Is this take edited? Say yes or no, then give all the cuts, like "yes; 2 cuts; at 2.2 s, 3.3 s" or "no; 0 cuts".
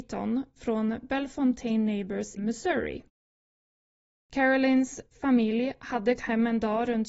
yes; 2 cuts; at 2.4 s, 6.2 s